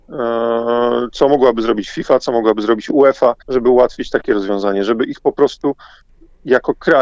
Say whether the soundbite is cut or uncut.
cut